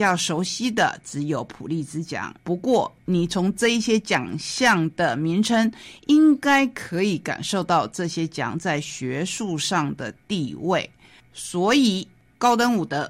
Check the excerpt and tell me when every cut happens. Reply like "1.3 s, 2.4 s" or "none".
2.4 s